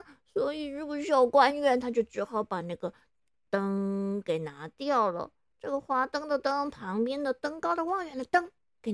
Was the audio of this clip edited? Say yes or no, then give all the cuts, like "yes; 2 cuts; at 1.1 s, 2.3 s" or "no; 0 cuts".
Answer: no; 0 cuts